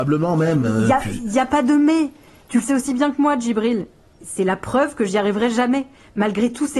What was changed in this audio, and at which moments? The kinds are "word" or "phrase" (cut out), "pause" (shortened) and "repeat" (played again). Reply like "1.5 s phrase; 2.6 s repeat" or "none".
none